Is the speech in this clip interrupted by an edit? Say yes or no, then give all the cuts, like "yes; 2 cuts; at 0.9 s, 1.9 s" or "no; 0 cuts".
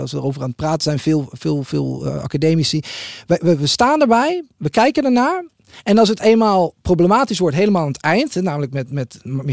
no; 0 cuts